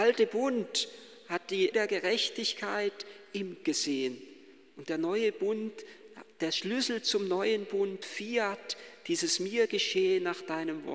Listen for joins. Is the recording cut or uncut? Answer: cut